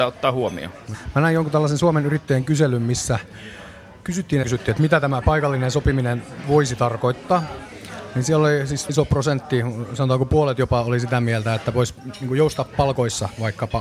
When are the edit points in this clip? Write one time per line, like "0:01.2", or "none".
0:04.4
0:08.9